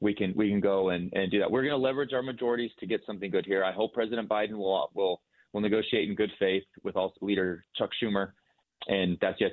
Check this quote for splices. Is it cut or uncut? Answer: uncut